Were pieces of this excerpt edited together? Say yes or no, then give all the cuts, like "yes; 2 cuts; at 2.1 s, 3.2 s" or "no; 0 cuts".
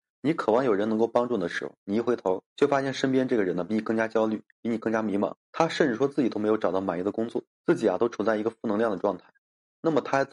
yes; 3 cuts; at 2.5 s, 5.4 s, 7.5 s